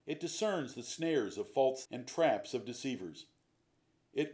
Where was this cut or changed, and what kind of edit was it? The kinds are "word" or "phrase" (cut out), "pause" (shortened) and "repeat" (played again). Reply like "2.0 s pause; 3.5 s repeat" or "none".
1.8 s word